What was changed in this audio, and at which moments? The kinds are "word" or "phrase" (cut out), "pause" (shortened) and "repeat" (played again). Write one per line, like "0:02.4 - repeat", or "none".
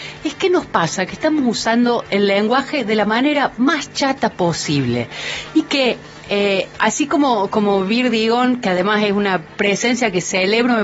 none